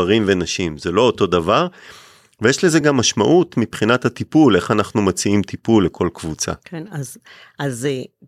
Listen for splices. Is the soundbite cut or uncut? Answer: uncut